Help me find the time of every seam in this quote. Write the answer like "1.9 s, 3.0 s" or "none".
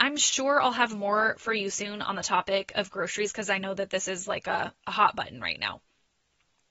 none